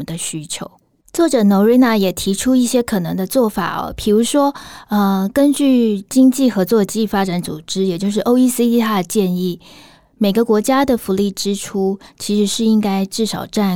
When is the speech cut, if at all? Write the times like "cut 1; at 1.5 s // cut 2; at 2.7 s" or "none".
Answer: none